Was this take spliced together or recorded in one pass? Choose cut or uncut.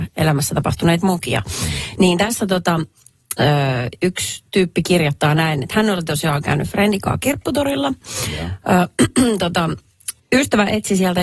cut